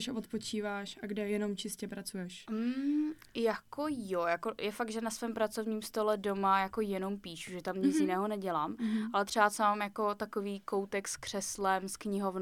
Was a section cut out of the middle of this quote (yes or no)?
no